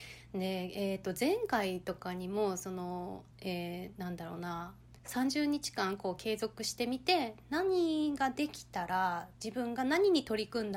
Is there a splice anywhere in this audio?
yes; 3 cuts; at 3.3 s, 5.0 s, 9.4 s

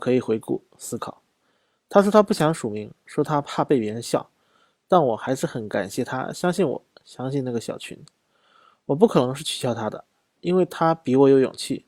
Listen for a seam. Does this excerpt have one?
no; 0 cuts

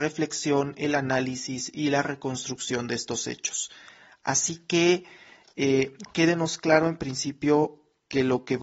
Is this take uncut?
yes; 0 cuts

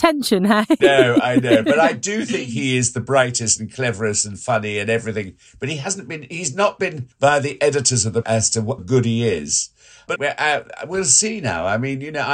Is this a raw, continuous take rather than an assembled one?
no; 4 cuts; at 7.1 s, 8.2 s, 8.8 s, 10.2 s

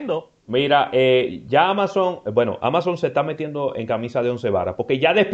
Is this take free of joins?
yes; 0 cuts

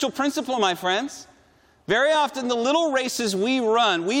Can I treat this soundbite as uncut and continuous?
yes; 0 cuts

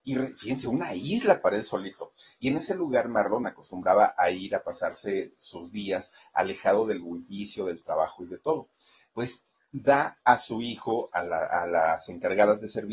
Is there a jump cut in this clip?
no; 0 cuts

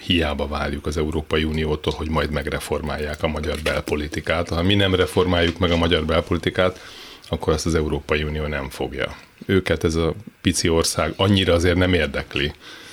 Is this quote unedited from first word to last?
no; 1 cut; at 10.3 s

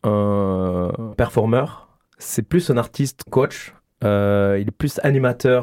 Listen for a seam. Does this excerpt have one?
yes; 2 cuts; at 1.1 s, 3.3 s

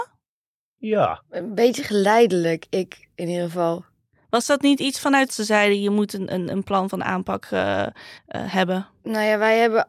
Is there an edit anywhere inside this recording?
yes; 2 cuts; at 5.3 s, 8.2 s

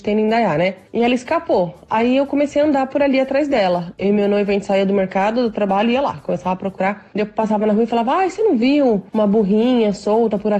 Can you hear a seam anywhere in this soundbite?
no; 0 cuts

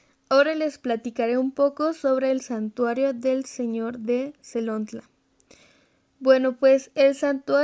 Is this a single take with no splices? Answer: yes; 0 cuts

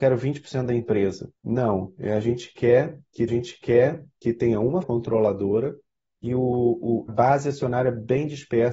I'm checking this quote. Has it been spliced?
yes; 5 cuts; at 1.4 s, 3.3 s, 4.8 s, 6.0 s, 7.1 s

